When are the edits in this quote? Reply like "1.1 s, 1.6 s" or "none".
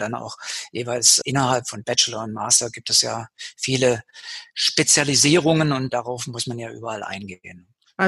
1.2 s, 5.9 s